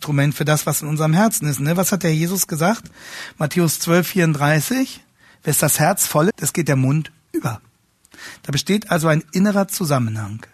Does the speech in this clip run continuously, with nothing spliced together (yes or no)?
no